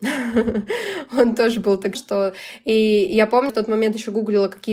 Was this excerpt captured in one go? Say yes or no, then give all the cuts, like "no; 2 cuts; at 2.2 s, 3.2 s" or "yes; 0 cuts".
no; 2 cuts; at 1.9 s, 3.5 s